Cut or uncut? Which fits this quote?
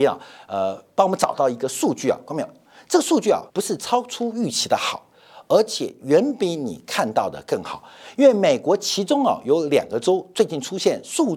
cut